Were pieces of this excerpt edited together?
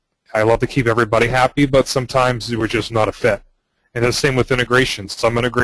no; 0 cuts

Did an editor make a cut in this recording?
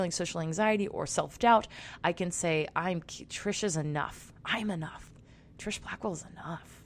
no; 0 cuts

